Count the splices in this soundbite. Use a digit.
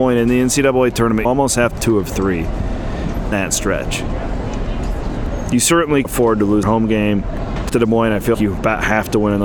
7